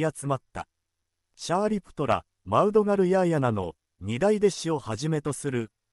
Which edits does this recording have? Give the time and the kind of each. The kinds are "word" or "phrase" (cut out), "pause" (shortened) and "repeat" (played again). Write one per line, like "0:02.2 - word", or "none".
none